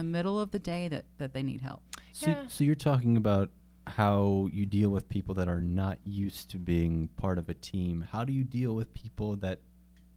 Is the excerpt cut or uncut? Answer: uncut